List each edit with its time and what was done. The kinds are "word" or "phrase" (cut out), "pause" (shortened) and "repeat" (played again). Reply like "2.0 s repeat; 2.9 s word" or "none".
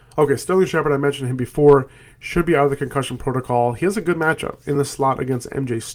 none